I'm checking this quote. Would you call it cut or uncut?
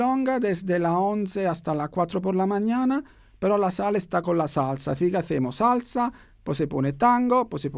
cut